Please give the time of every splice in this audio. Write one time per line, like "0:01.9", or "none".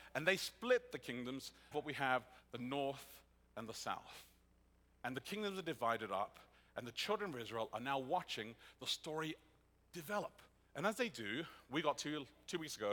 0:01.7

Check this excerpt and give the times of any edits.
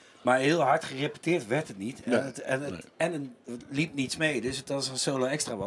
none

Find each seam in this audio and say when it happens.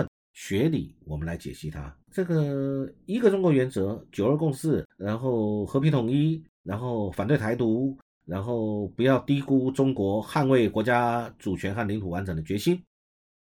0:02.0
0:04.9

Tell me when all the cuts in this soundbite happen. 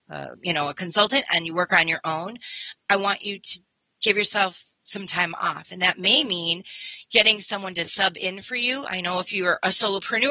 0:04.7

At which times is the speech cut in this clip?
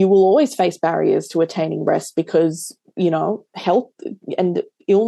0:03.5

